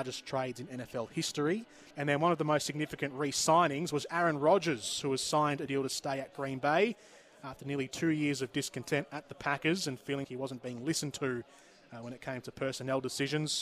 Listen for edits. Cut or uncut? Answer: cut